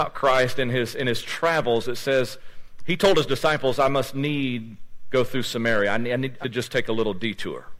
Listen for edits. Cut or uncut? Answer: cut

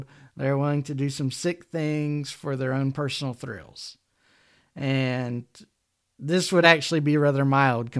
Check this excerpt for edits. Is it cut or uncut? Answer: uncut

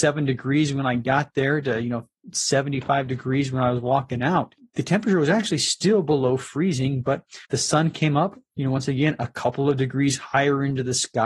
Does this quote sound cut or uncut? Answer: cut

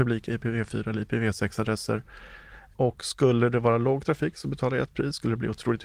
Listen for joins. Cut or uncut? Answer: uncut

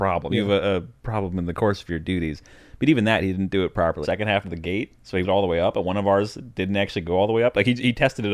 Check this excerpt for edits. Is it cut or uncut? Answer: cut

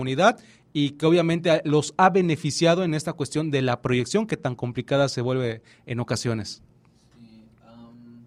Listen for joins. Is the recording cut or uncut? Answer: uncut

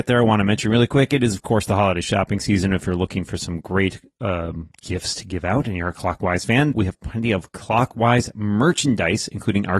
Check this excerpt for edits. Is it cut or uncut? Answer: uncut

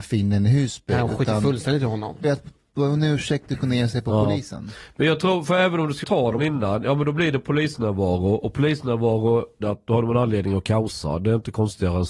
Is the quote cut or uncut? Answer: cut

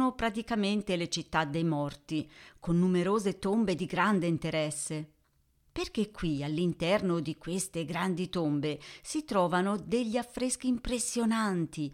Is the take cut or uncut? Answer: uncut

